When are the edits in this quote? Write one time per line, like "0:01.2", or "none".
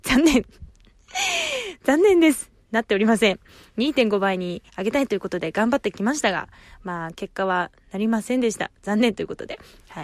0:04.7